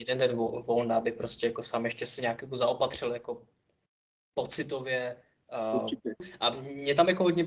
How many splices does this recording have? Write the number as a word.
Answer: zero